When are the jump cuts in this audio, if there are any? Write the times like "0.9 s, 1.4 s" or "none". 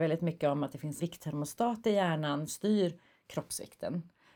1.0 s, 2.5 s